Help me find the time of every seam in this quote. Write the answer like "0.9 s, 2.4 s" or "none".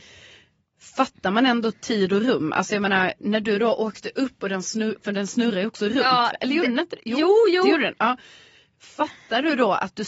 none

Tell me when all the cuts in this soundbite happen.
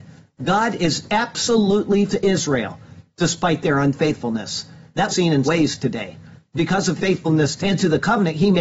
2.1 s, 5.1 s, 5.4 s, 7.0 s, 7.6 s

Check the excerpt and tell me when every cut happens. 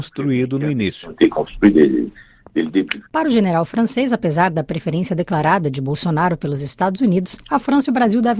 3.1 s, 7.4 s

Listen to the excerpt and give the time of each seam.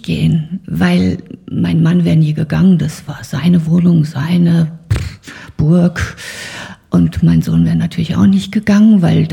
none

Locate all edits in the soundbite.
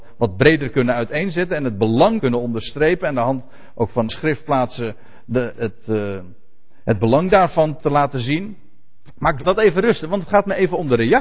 2.2 s, 4.1 s, 5.5 s, 7.8 s, 9.4 s

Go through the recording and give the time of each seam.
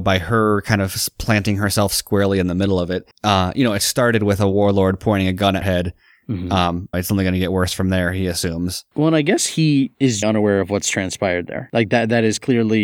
3.1 s, 5.6 s, 6.9 s, 10.2 s

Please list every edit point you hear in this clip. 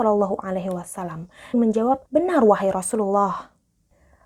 1.5 s, 2.1 s

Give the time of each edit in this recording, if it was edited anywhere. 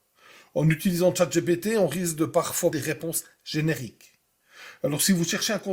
2.7 s

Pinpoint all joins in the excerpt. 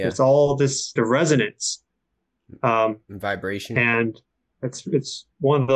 1.0 s, 4.6 s

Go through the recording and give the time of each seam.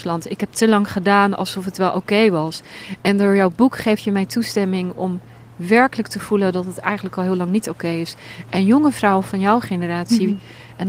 none

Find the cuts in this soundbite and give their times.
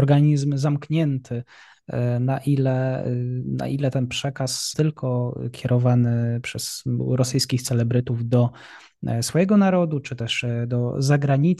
4.7 s

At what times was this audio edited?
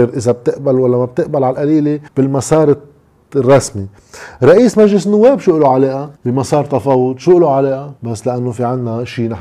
2.1 s, 6.2 s, 8.0 s

